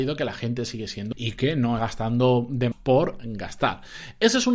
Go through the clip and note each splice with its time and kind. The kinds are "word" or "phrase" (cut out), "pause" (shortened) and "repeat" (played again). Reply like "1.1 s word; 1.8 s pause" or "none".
1.1 s word; 1.8 s word; 2.7 s word